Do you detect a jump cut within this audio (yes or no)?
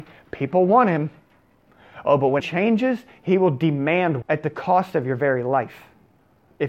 yes